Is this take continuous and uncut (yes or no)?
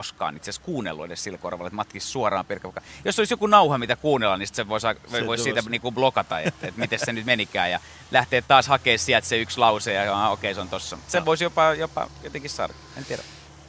yes